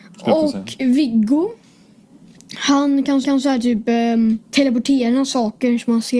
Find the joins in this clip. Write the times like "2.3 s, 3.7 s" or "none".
3.2 s, 4.4 s